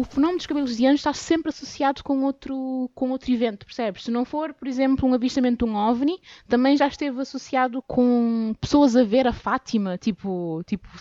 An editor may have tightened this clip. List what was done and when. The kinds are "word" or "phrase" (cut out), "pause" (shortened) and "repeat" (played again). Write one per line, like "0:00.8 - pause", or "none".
0:07.8 - word

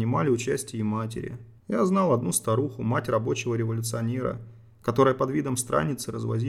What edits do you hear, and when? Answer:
0:01.6 - pause

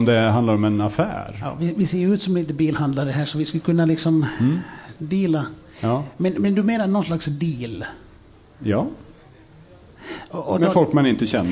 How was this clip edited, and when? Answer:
none

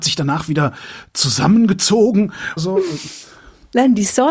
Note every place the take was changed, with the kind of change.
0:02.6 - word

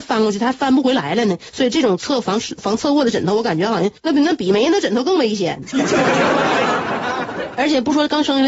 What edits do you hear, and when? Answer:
0:04.0 - pause

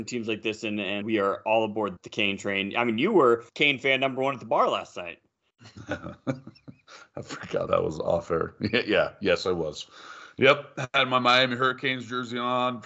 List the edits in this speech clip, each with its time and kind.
0:01.0 - word
0:02.0 - word
0:03.5 - pause
0:05.3 - pause
0:07.7 - word

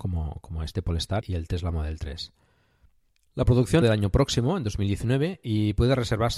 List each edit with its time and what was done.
0:01.2 - word
0:03.1 - pause
0:03.8 - phrase

